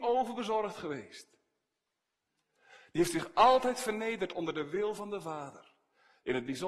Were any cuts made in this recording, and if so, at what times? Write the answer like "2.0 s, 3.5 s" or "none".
none